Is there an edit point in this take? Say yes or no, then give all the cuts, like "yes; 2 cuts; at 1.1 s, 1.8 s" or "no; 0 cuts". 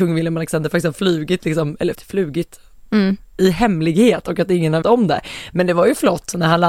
yes; 2 cuts; at 1.9 s, 4.8 s